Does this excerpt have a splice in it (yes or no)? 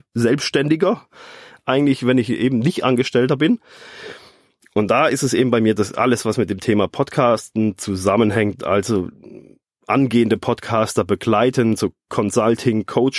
no